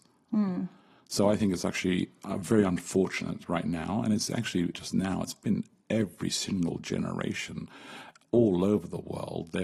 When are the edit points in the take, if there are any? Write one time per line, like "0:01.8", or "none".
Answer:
0:04.7

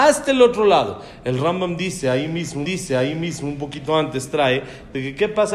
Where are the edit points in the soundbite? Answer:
0:02.6

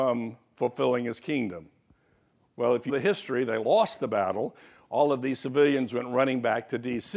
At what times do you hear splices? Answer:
0:02.9

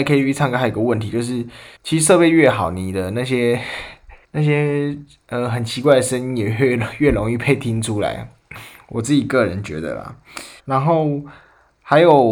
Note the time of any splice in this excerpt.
0:01.8
0:04.2
0:10.6

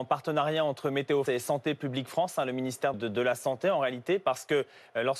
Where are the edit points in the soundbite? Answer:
0:01.3
0:02.9

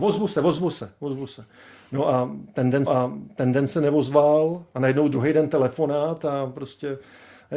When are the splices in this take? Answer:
0:02.9

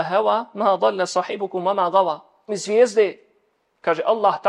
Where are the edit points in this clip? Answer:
0:02.5

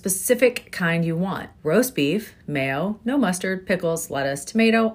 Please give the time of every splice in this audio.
0:01.6

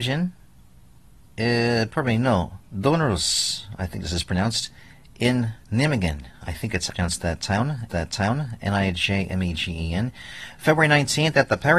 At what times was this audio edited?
0:02.6
0:05.6
0:06.9
0:07.9

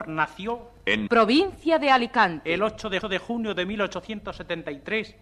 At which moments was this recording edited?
0:01.1
0:03.0

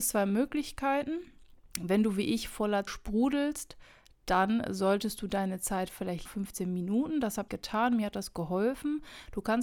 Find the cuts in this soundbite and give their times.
0:01.7
0:02.9
0:06.3
0:07.5

